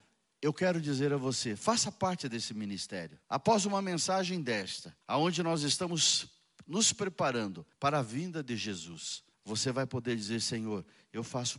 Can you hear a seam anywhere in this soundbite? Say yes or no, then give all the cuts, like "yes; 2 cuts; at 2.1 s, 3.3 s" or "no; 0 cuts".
yes; 4 cuts; at 3.2 s, 5.0 s, 7.7 s, 9.3 s